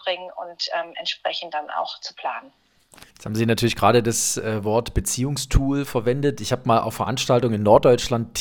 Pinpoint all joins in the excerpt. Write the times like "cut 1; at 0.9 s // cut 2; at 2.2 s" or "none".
cut 1; at 3.1 s // cut 2; at 6.9 s